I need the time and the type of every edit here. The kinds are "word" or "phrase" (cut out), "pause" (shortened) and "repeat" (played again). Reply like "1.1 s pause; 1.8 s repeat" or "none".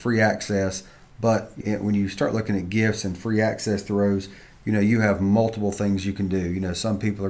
1.6 s word